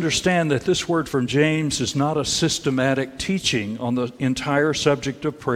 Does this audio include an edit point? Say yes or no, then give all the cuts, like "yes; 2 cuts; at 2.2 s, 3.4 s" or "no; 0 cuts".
no; 0 cuts